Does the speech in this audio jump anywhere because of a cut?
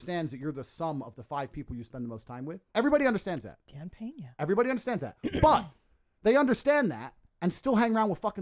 no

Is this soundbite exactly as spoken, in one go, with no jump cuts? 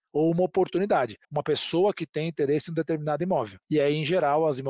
no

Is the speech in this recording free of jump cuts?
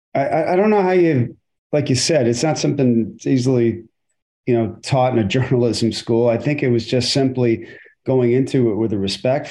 yes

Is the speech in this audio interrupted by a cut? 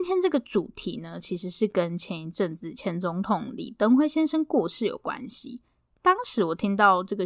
no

